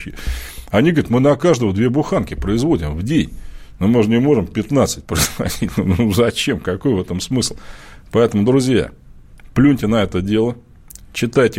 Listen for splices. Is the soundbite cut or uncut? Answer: uncut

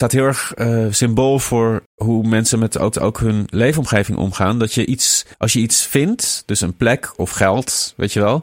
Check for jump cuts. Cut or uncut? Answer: cut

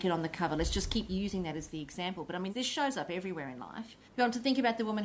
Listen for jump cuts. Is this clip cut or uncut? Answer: cut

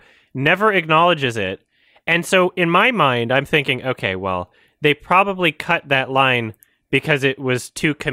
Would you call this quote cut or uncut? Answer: uncut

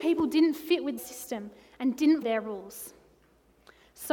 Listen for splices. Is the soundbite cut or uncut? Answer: cut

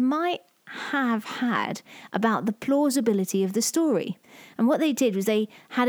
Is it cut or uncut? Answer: uncut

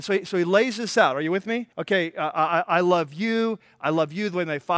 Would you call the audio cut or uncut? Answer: cut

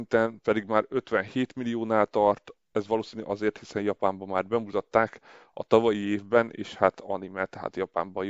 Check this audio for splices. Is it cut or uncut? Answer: uncut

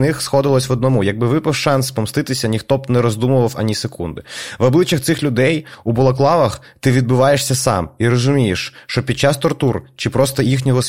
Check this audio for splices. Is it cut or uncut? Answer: uncut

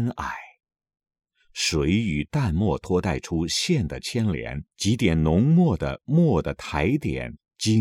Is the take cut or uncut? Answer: cut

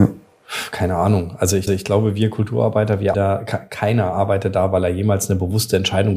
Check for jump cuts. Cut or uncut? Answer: cut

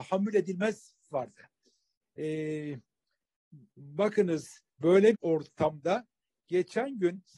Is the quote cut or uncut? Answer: cut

